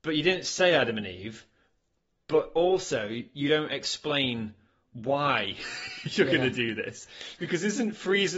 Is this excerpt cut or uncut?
uncut